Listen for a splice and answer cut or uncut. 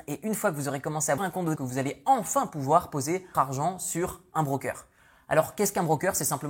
cut